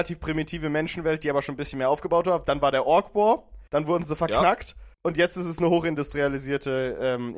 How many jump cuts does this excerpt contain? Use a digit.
2